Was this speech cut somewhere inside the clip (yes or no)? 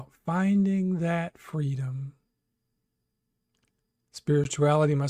no